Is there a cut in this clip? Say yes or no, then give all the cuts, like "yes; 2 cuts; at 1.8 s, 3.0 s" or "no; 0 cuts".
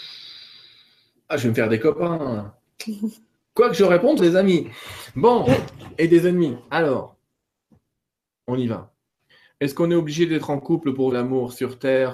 yes; 3 cuts; at 4.2 s, 6.6 s, 11.1 s